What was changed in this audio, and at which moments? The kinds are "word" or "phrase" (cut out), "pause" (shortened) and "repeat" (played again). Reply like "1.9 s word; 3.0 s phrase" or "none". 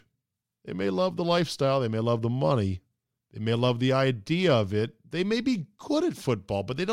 3.2 s pause